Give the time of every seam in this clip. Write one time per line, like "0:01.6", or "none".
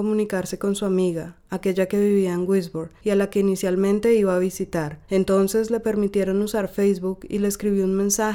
0:03.0
0:05.0